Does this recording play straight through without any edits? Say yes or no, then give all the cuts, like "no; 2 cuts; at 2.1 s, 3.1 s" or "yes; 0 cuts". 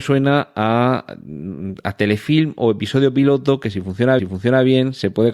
no; 1 cut; at 4.2 s